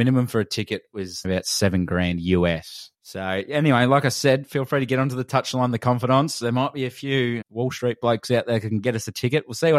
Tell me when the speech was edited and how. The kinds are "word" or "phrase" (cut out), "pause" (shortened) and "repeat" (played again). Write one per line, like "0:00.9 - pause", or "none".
0:01.2 - phrase
0:02.9 - pause
0:07.4 - word

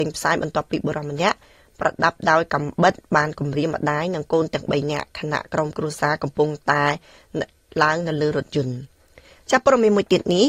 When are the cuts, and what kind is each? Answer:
none

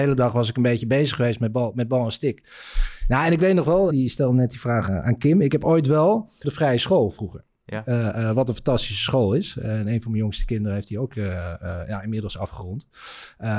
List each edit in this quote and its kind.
0:03.9 - word
0:04.9 - word
0:06.4 - phrase

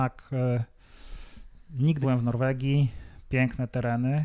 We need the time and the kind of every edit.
0:02.0 - word

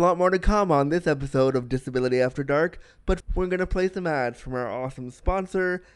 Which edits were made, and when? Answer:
0:03.2 - word

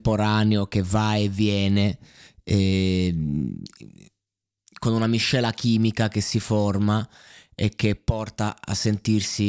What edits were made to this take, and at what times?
none

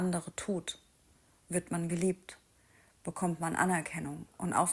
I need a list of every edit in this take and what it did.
none

